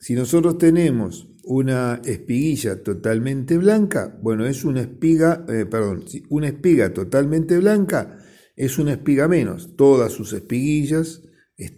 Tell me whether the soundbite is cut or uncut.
uncut